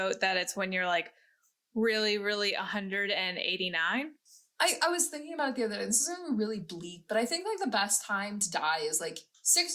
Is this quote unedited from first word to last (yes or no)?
yes